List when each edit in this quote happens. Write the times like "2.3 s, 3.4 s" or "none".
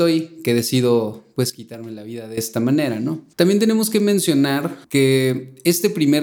4.8 s